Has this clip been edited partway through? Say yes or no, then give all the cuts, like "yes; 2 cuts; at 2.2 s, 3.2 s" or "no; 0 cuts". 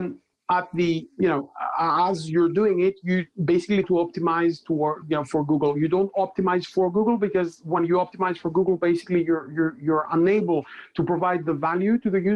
yes; 1 cut; at 3.8 s